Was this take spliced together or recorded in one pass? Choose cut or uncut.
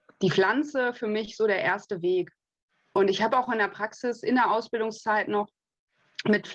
uncut